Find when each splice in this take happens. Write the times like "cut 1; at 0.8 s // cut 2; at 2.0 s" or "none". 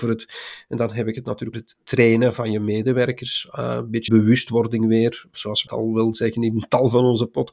cut 1; at 1.5 s // cut 2; at 4.1 s // cut 3; at 5.7 s